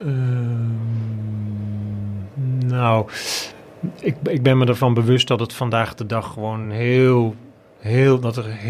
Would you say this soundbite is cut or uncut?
uncut